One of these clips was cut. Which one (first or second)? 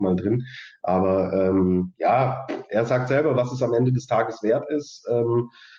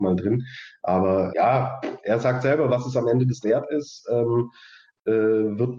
second